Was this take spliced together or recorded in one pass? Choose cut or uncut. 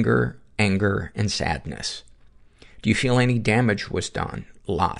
uncut